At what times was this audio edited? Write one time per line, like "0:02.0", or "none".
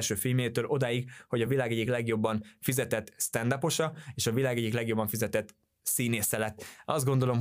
none